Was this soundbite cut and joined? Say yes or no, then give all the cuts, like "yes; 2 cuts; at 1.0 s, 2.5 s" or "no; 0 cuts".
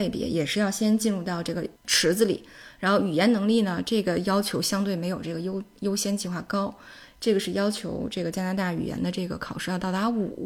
yes; 1 cut; at 1.8 s